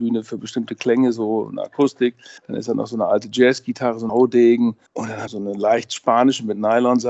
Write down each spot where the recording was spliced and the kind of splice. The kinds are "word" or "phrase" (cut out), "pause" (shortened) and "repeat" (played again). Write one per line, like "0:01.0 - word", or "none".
0:02.4 - pause
0:04.1 - word
0:04.9 - pause
0:05.3 - phrase